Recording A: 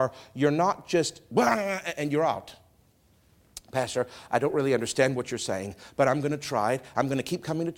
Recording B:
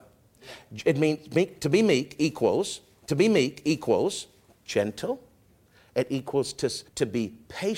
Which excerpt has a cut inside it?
B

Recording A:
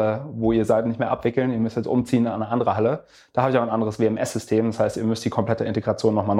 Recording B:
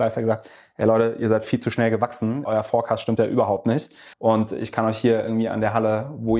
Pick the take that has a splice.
B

